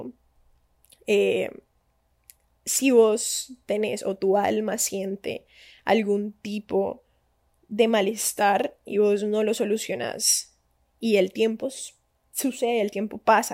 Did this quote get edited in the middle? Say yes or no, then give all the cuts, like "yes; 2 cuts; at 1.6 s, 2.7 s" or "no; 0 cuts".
no; 0 cuts